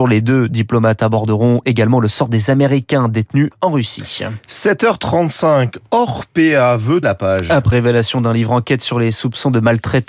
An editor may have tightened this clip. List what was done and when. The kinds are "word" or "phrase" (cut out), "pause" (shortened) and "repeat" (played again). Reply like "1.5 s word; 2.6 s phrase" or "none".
7.0 s word; 7.7 s word